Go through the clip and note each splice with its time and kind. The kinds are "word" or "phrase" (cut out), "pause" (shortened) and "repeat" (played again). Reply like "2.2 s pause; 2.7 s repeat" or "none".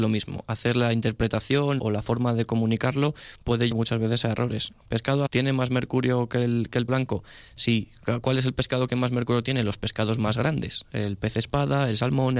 1.8 s word; 3.7 s word; 5.3 s word; 6.9 s word